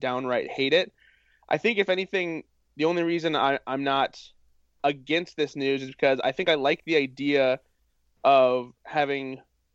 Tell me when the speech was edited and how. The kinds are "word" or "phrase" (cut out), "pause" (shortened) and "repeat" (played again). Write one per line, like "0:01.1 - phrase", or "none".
none